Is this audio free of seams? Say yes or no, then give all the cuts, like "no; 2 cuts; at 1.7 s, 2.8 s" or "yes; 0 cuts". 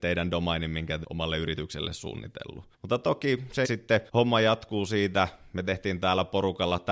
no; 4 cuts; at 1.0 s, 2.7 s, 3.6 s, 4.1 s